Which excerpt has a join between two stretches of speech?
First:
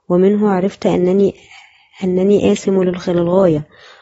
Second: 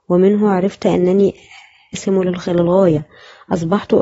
second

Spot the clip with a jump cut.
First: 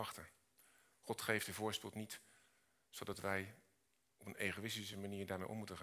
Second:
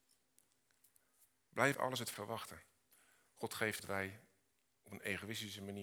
second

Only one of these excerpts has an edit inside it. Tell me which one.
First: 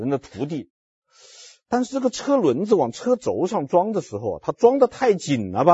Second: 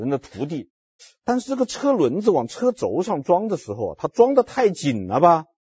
second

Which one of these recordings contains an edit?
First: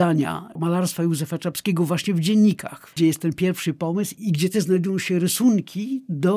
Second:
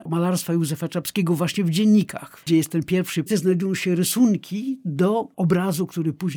second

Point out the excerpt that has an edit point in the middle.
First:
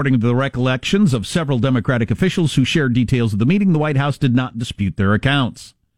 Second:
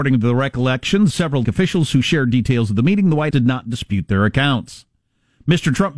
second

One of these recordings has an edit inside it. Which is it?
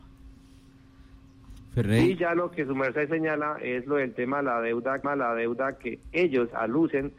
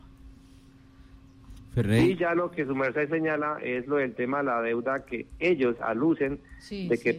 first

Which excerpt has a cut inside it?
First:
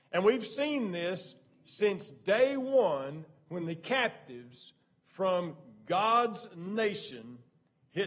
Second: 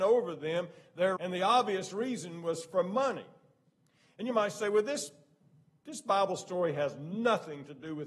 second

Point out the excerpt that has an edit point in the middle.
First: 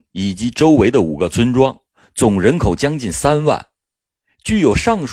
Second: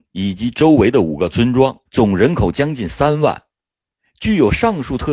second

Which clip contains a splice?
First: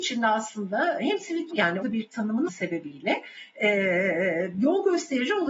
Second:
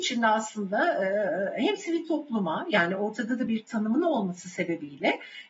first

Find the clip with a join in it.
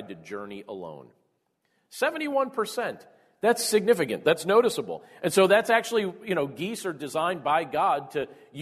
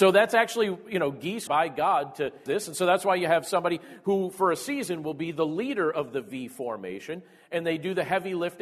second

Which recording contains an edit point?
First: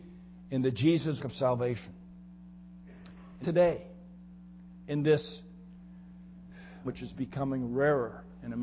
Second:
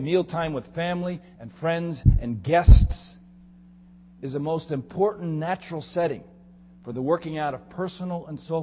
first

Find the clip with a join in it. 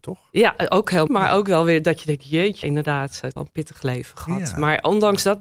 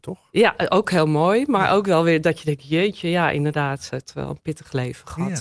first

